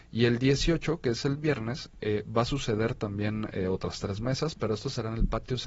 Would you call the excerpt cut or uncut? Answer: uncut